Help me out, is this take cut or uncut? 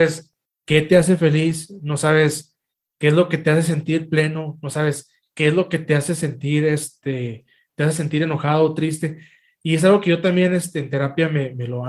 uncut